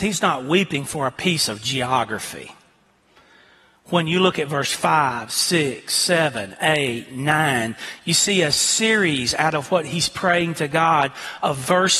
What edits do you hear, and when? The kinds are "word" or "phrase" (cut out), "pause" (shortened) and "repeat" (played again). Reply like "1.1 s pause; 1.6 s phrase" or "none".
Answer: none

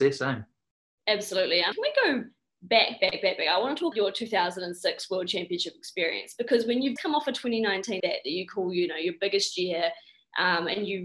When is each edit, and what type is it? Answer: 1.7 s word; 3.0 s word; 3.9 s word; 7.0 s word; 8.0 s word

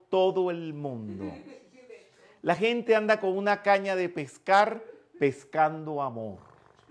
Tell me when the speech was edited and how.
none

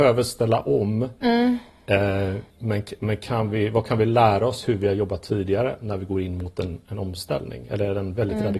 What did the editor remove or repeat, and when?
2.5 s pause

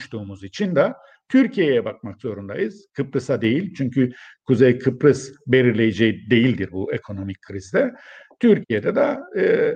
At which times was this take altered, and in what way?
none

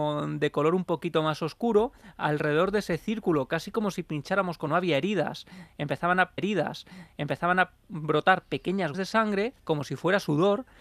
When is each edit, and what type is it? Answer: 4.7 s phrase; 6.4 s repeat; 8.9 s word; 9.6 s pause

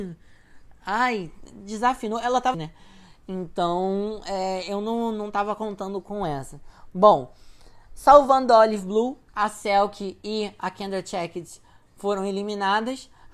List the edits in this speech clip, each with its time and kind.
2.5 s phrase; 9.3 s pause

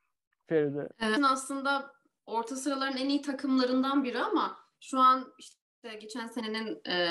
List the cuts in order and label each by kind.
1.2 s phrase

